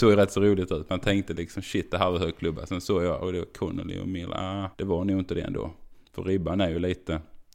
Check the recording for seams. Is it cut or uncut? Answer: cut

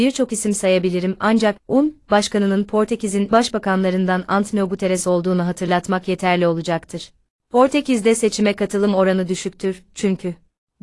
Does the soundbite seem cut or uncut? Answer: cut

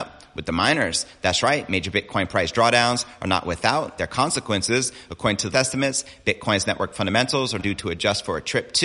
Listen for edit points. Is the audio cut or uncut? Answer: cut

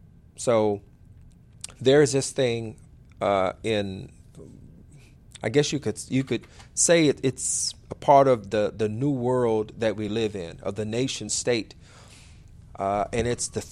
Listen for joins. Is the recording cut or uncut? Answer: uncut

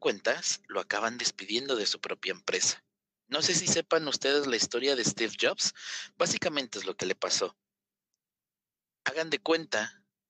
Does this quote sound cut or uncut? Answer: uncut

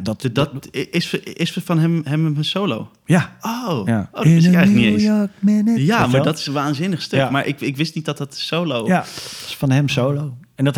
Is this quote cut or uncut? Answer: uncut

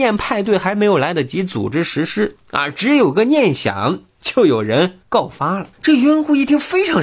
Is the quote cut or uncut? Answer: cut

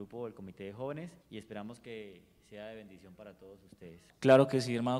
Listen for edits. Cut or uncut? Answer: cut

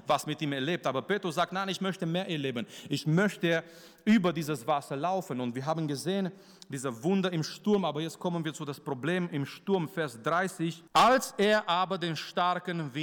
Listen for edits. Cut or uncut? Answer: cut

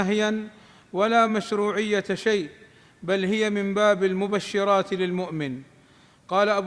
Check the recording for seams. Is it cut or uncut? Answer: uncut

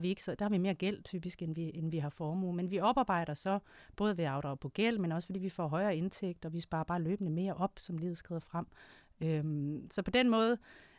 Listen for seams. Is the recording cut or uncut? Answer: uncut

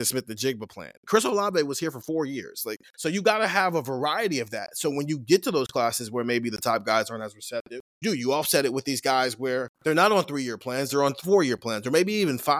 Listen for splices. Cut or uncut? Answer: cut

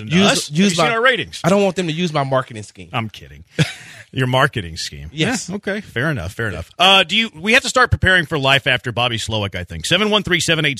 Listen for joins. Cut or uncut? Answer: uncut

